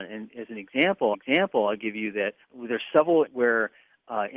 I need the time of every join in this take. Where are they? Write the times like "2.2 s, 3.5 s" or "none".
1.1 s, 2.4 s, 3.3 s